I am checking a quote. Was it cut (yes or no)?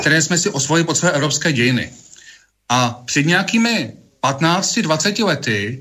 no